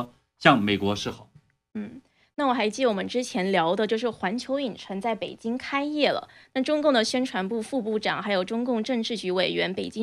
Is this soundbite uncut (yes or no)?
yes